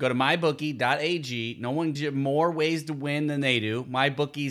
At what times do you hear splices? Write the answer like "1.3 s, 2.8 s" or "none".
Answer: 1.9 s